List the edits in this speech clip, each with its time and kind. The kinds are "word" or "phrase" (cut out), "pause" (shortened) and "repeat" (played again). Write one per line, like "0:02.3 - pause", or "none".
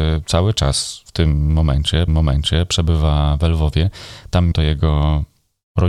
0:01.1 - pause
0:02.1 - repeat
0:04.5 - word